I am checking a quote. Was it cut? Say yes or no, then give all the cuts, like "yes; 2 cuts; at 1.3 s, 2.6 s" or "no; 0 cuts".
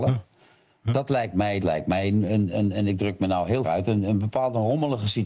yes; 2 cuts; at 1.6 s, 3.6 s